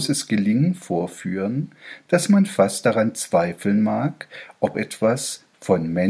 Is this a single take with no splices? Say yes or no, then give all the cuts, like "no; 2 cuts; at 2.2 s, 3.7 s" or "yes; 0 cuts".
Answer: no; 1 cut; at 4.7 s